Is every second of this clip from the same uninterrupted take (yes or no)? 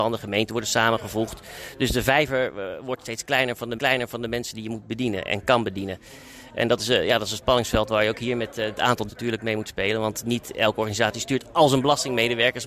no